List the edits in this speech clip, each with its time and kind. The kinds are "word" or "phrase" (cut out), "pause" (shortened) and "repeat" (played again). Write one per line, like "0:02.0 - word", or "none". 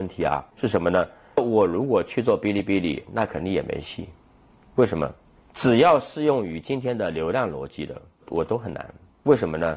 none

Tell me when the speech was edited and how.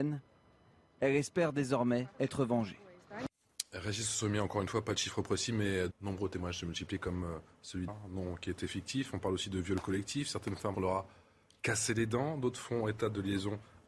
0:02.1 - pause
0:05.9 - word
0:07.9 - word
0:10.7 - word

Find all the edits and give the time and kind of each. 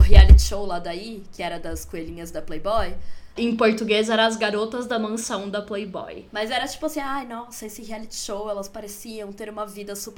none

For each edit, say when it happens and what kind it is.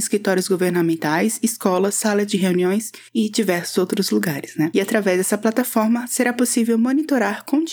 none

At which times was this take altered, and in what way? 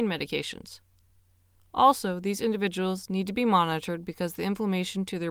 none

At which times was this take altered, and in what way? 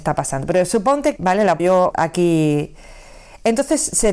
0:01.2 - word
0:01.6 - word
0:01.9 - word

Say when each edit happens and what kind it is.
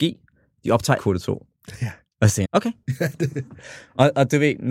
0:01.0 - word
0:02.4 - word

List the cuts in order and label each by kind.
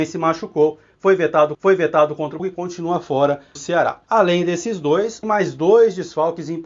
0:01.5 - repeat
0:02.4 - word
0:03.6 - phrase
0:04.0 - pause
0:05.2 - phrase

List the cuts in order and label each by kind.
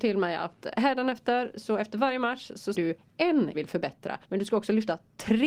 0:02.7 - word
0:03.5 - phrase
0:04.2 - pause

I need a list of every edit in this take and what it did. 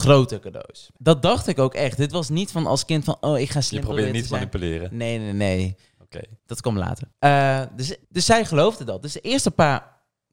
0:06.4 - pause
0:07.1 - pause
0:08.0 - pause

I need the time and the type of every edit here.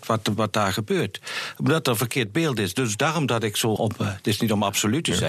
0:03.8 - word

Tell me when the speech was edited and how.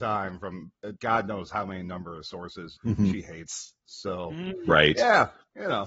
0:01.0 - pause
0:02.8 - word

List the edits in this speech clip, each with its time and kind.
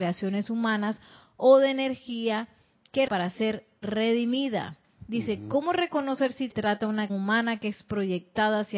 0:03.1 - word
0:06.5 - word
0:07.1 - word

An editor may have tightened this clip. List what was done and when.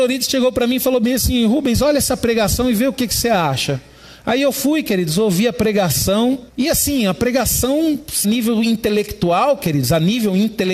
0:06.5 - pause
0:08.2 - phrase

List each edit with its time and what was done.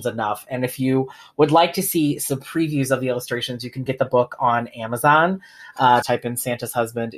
0:03.9 - word
0:06.0 - word

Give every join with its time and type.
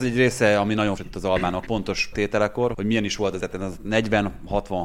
0:01.0 - word
0:01.7 - word
0:02.1 - word
0:02.7 - word
0:03.4 - word

